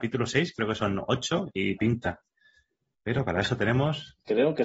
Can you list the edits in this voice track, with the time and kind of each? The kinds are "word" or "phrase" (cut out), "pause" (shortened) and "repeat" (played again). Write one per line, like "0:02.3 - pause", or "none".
0:01.8 - phrase